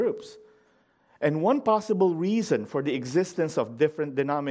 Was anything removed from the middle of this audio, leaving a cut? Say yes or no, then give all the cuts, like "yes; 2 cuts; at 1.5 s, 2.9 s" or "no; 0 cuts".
no; 0 cuts